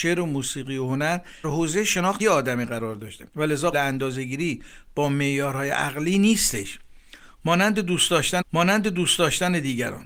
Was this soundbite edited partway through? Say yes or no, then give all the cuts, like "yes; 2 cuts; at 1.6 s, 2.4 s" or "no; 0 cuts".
yes; 5 cuts; at 1.4 s, 2.2 s, 3.3 s, 3.7 s, 8.4 s